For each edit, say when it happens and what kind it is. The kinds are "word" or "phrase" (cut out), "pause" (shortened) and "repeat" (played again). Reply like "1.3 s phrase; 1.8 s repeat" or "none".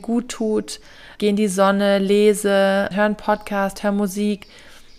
1.2 s word; 2.9 s word